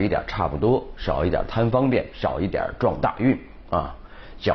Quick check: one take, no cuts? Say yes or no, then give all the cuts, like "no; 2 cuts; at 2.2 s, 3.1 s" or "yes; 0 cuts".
yes; 0 cuts